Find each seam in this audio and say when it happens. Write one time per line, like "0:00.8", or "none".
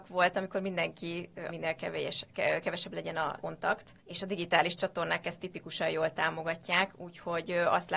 0:01.5
0:03.4
0:04.0